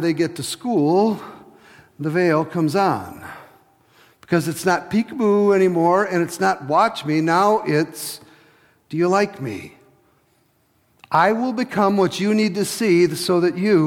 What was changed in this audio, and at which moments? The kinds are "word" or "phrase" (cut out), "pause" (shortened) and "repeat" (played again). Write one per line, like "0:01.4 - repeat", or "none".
none